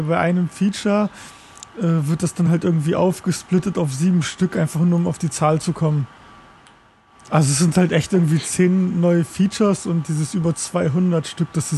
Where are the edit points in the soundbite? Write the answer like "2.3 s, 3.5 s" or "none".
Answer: none

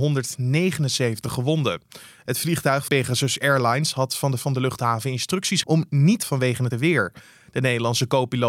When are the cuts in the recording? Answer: 2.9 s, 4.4 s, 5.6 s, 6.2 s, 6.7 s

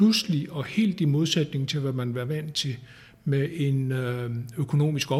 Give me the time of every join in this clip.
none

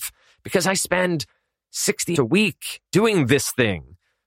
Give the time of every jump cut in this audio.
2.2 s, 2.9 s

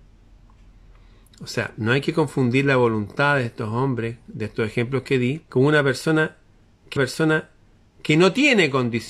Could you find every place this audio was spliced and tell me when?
5.5 s, 7.0 s

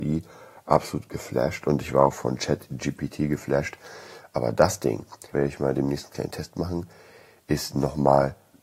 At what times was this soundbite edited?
5.3 s

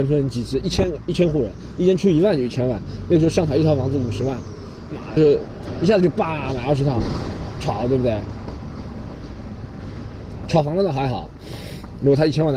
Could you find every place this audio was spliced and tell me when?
5.2 s

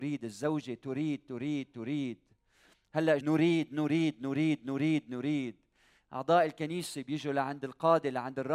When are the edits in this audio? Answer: 3.2 s, 4.6 s

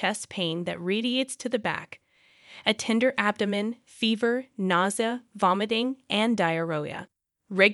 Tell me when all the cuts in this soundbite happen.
none

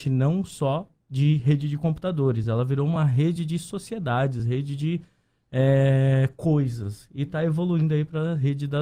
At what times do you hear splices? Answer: none

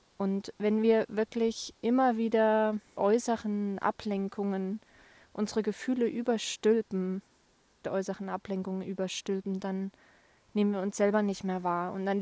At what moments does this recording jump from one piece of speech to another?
1.8 s, 2.9 s, 7.8 s

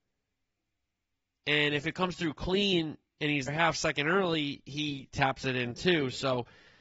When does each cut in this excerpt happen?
3.5 s

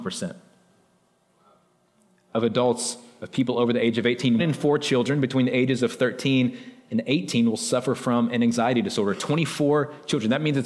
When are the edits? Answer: 4.4 s

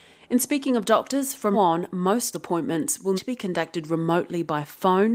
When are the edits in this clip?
1.5 s, 2.3 s, 3.2 s

